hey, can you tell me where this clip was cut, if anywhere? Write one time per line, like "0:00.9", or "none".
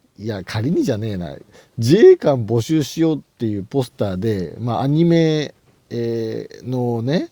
none